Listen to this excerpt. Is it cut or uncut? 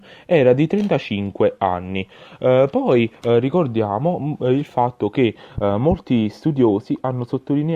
uncut